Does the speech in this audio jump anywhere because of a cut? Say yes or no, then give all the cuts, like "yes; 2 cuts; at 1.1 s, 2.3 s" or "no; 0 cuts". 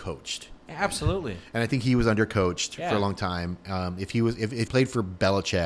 yes; 1 cut; at 4.7 s